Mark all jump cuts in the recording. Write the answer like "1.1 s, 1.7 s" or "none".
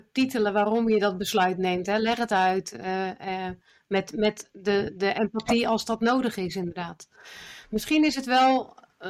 none